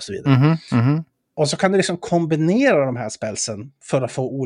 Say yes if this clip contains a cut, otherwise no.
no